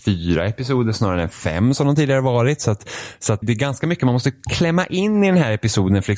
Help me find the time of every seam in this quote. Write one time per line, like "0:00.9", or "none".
0:03.4